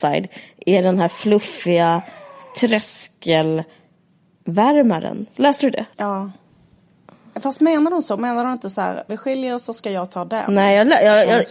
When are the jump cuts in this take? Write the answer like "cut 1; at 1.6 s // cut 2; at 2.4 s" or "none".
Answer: cut 1; at 5.9 s // cut 2; at 9.1 s